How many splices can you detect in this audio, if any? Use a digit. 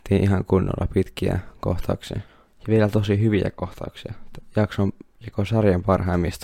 1